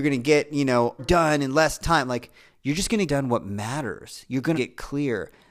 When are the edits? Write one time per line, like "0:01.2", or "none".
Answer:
0:01.0
0:03.1
0:04.5